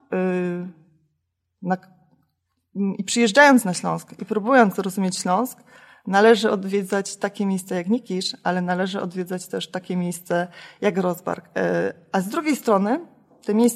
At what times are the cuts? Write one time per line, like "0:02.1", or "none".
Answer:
none